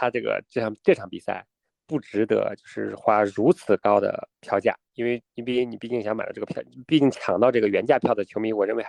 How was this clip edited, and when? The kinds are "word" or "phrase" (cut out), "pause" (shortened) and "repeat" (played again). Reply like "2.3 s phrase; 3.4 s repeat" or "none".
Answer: 1.7 s pause; 4.4 s pause